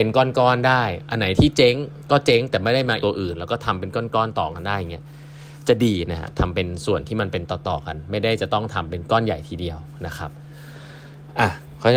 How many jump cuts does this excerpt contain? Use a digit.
1